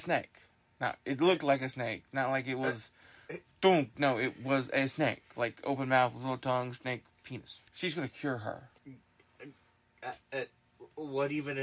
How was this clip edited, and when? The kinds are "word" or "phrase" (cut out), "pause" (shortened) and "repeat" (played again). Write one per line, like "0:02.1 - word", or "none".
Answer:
0:07.7 - pause
0:08.8 - pause
0:10.2 - pause

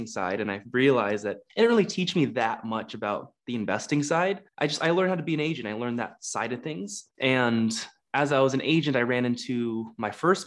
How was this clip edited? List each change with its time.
0:01.5 - pause
0:04.5 - pause
0:07.1 - pause

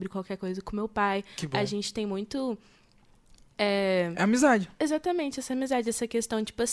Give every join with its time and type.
none

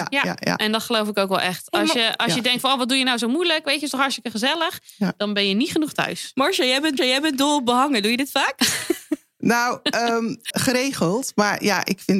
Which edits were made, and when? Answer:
0:07.0 - repeat
0:10.5 - word

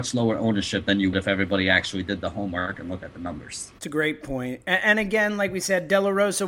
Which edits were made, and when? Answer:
0:01.1 - word

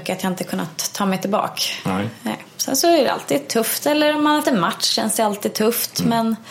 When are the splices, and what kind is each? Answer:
0:04.4 - word

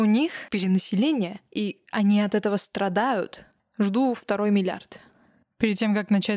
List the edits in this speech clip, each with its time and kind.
0:03.6 - pause

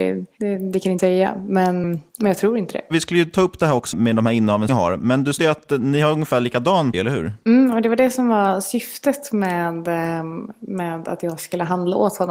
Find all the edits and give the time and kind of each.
0:01.0 - word
0:01.8 - word
0:03.9 - word
0:04.7 - word
0:05.4 - word
0:06.9 - word

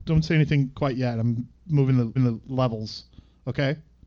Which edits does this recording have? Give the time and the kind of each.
0:02.2 - repeat

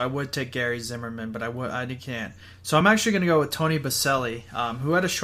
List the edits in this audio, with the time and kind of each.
none

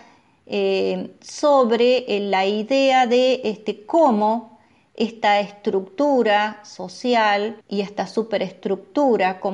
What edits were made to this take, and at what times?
0:07.6 - pause

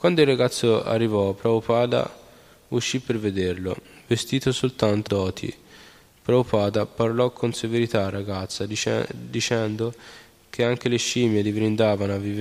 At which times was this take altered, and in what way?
0:05.1 - word

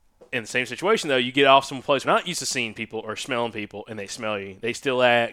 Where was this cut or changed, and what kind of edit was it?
0:02.0 - phrase

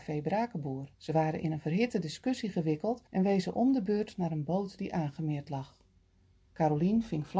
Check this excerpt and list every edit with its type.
0:00.9 - pause
0:03.1 - pause

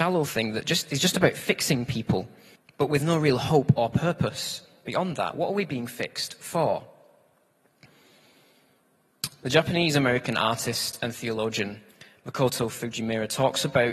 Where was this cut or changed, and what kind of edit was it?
0:02.6 - pause

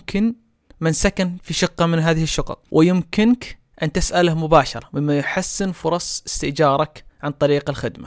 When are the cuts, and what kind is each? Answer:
none

